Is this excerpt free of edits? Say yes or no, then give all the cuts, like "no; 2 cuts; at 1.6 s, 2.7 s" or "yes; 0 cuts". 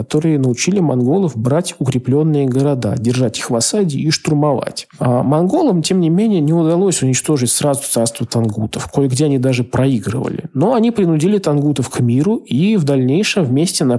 yes; 0 cuts